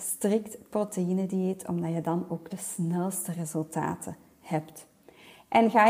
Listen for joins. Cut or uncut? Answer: uncut